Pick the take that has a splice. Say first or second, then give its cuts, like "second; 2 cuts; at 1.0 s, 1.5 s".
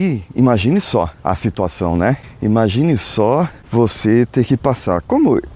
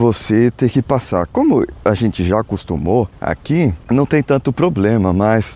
first; 1 cut; at 1.2 s